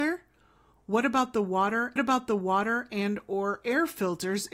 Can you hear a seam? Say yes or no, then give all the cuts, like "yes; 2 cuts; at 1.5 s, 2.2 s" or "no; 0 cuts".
yes; 1 cut; at 2.0 s